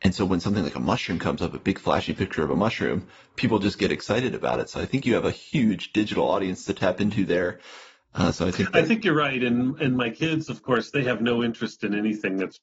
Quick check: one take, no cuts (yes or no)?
yes